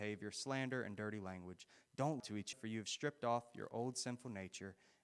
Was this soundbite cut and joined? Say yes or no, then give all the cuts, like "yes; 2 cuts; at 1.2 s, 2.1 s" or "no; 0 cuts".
yes; 2 cuts; at 2.2 s, 2.5 s